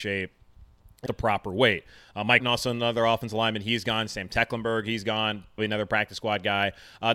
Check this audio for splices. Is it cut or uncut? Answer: cut